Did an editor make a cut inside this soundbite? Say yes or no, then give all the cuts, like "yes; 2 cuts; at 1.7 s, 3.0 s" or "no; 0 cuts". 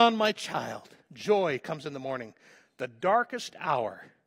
no; 0 cuts